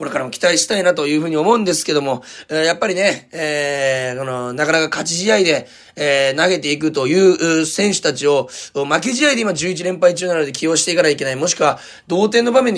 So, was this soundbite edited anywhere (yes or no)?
no